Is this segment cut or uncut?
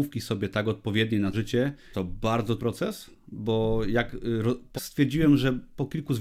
cut